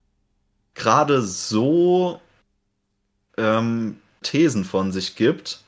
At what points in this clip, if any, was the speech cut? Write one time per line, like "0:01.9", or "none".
0:04.2